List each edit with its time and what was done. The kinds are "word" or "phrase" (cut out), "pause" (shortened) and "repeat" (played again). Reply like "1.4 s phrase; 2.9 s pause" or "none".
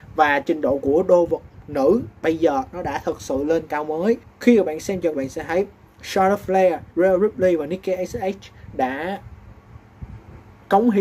3.7 s word; 4.2 s pause; 5.1 s phrase; 6.9 s pause